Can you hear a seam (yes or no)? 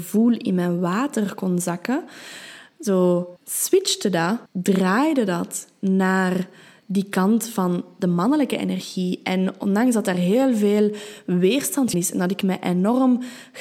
yes